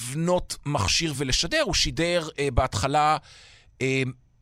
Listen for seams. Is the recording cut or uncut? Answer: uncut